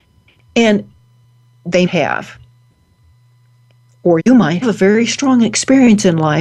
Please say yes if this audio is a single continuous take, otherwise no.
no